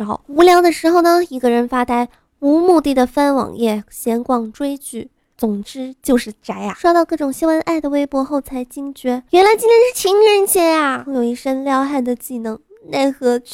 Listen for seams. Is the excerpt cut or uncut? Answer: uncut